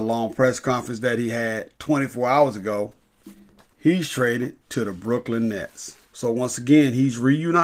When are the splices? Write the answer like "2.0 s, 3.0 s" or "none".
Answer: 1.8 s, 3.6 s, 4.6 s, 6.0 s